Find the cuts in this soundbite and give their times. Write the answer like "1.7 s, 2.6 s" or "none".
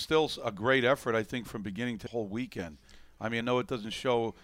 2.1 s, 3.4 s